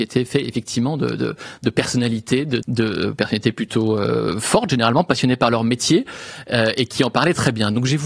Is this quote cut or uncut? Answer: cut